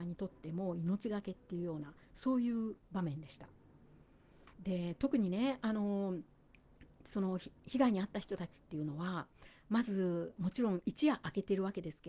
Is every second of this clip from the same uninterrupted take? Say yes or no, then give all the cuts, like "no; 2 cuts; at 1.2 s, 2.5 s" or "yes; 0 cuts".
no; 3 cuts; at 2.0 s, 2.8 s, 4.5 s